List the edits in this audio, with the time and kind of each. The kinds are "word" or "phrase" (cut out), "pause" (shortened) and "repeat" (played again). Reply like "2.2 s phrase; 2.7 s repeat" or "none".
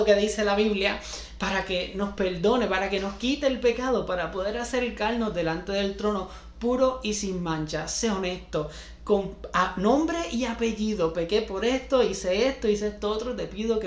none